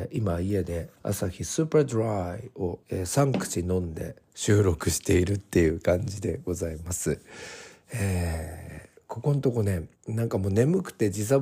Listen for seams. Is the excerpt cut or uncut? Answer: cut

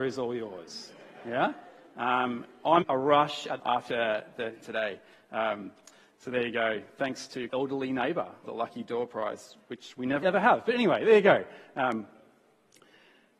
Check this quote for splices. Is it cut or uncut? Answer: cut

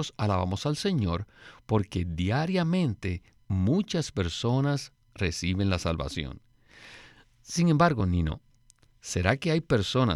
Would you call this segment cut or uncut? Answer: uncut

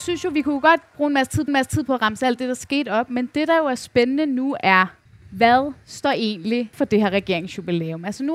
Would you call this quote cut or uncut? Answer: cut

